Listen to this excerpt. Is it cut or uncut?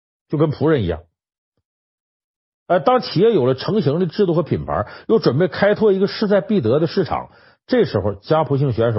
uncut